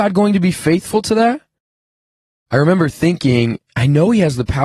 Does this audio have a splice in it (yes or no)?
yes